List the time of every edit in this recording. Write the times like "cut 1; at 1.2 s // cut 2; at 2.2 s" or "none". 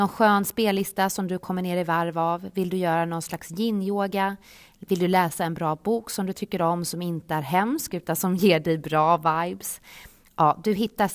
none